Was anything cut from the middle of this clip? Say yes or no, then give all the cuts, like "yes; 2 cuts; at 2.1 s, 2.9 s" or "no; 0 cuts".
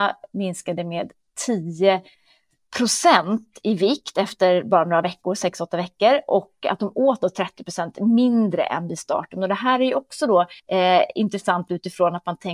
yes; 1 cut; at 10.6 s